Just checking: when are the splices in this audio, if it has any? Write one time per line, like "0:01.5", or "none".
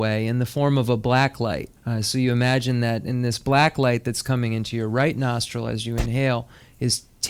0:01.8